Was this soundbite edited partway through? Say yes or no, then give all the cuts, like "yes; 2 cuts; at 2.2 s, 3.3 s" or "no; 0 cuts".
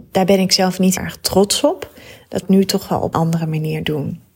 yes; 3 cuts; at 1.0 s, 2.4 s, 3.1 s